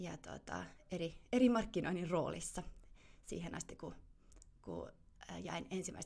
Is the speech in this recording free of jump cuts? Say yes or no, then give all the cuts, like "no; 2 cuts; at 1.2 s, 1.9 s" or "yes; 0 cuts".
yes; 0 cuts